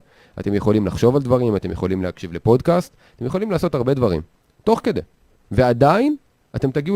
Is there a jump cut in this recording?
no; 0 cuts

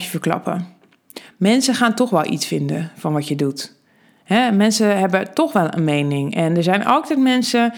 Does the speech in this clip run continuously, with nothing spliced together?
yes; 0 cuts

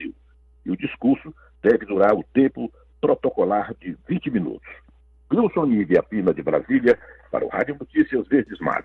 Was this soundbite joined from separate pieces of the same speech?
no; 0 cuts

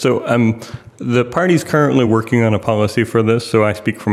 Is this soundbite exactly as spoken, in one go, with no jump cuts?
yes; 0 cuts

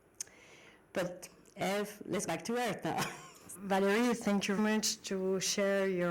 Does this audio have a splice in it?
yes; 3 cuts; at 2.3 s, 3.5 s, 4.6 s

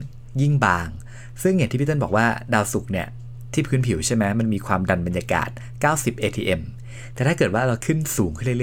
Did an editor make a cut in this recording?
no; 0 cuts

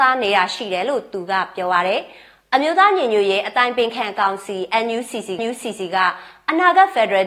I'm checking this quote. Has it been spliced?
yes; 1 cut; at 5.4 s

